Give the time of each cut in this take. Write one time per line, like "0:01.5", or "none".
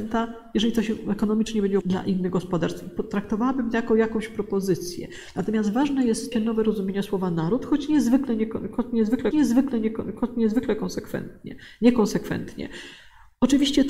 0:01.8
0:06.3
0:09.3